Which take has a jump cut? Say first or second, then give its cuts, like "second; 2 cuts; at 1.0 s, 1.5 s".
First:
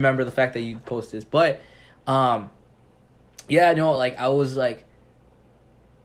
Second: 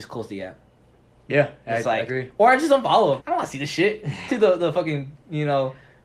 second; 3 cuts; at 2.1 s, 3.2 s, 4.3 s